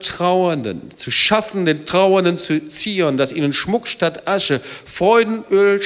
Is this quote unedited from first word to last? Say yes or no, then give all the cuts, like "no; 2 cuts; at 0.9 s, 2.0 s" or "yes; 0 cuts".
yes; 0 cuts